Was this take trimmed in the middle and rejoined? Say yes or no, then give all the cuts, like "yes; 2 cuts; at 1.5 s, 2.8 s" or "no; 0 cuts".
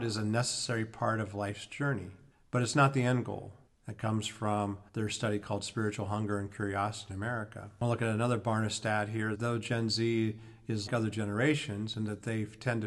yes; 6 cuts; at 2.3 s, 3.7 s, 4.9 s, 7.1 s, 9.3 s, 10.9 s